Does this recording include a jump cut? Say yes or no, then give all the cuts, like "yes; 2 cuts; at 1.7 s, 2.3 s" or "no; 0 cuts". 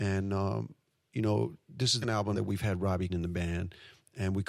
yes; 3 cuts; at 2.0 s, 2.3 s, 3.1 s